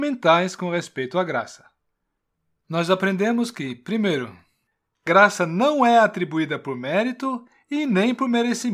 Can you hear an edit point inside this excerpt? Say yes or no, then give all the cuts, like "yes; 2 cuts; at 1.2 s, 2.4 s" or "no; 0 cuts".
no; 0 cuts